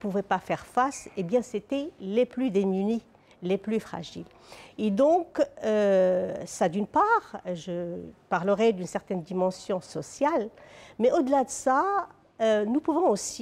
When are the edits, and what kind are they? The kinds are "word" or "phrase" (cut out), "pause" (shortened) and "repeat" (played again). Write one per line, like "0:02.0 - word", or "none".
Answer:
none